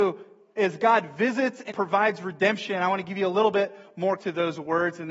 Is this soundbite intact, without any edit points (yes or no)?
no